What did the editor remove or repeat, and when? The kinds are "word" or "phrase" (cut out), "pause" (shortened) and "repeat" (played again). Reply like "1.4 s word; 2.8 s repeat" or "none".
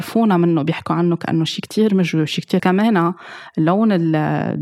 2.6 s phrase